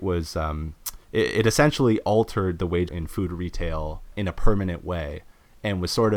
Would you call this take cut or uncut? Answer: cut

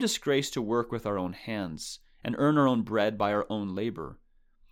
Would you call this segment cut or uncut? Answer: uncut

